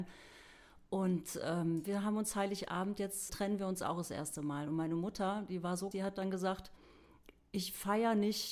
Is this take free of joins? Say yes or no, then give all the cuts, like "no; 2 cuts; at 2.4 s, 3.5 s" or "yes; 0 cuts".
no; 3 cuts; at 1.8 s, 3.3 s, 5.9 s